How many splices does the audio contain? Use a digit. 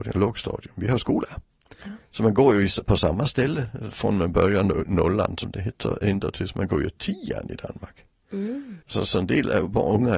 2